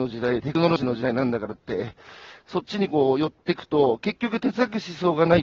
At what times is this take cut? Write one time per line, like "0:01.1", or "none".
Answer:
none